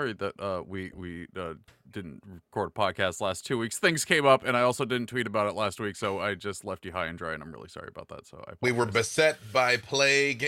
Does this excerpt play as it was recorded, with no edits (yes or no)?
yes